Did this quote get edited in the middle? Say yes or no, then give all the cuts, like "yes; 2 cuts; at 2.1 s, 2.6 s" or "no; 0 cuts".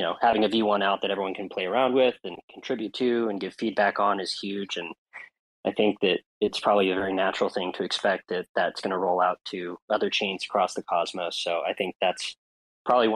no; 0 cuts